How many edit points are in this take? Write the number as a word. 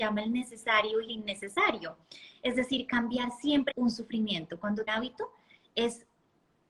three